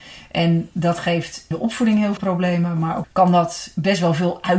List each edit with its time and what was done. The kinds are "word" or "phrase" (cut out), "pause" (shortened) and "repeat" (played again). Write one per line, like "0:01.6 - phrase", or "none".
0:01.5 - word
0:02.2 - word
0:03.0 - word